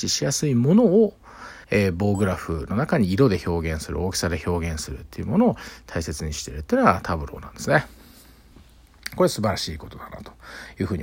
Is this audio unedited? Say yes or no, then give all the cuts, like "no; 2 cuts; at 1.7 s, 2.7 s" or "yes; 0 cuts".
no; 1 cut; at 1.6 s